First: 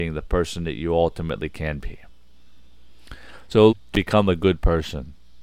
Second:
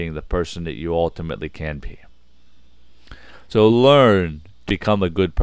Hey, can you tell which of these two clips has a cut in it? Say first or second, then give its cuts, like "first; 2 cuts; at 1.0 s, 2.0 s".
first; 1 cut; at 3.7 s